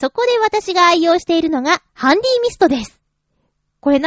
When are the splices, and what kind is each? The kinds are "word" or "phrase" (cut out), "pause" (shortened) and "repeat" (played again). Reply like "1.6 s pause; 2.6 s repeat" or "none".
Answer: 1.9 s pause